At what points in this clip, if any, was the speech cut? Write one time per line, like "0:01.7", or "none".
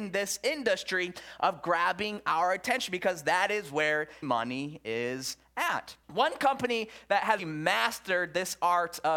0:04.2
0:06.0
0:07.4